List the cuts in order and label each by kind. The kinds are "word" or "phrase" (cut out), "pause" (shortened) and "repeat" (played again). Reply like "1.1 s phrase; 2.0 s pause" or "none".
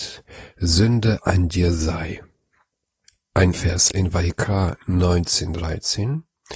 1.2 s word; 3.5 s word; 3.9 s word